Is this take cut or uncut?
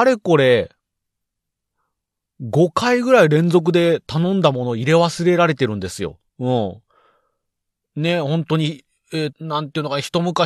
cut